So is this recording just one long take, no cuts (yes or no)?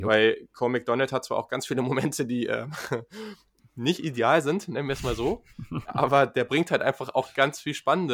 no